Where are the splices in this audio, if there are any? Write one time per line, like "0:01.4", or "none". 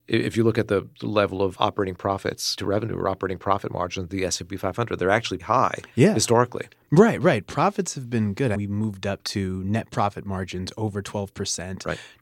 0:02.6
0:05.4
0:08.5